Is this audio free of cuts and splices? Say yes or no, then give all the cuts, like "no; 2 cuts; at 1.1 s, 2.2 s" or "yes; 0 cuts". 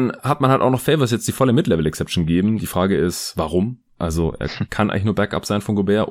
yes; 0 cuts